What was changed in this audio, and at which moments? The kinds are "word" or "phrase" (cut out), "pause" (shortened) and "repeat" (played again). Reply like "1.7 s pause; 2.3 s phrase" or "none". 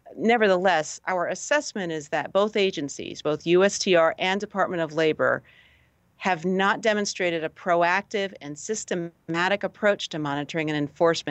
none